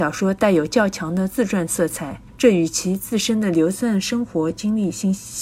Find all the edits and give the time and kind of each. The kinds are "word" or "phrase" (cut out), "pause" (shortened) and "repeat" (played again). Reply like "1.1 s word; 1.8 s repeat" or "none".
2.3 s pause